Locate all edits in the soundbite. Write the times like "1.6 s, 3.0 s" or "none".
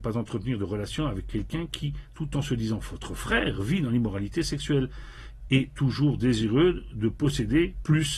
none